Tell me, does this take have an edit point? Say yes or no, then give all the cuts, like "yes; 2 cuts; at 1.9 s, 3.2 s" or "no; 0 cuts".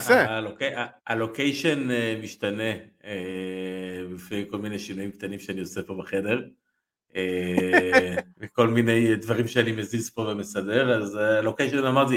yes; 2 cuts; at 1.0 s, 8.3 s